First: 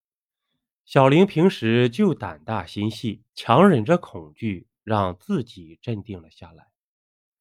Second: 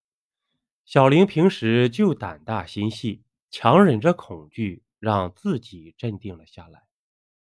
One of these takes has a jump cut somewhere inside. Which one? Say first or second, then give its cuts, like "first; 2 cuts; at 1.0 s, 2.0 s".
first; 1 cut; at 3.3 s